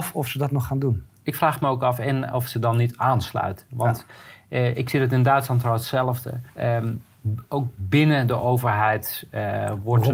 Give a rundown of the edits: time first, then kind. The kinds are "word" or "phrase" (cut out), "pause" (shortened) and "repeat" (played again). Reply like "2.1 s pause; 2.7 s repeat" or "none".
6.5 s pause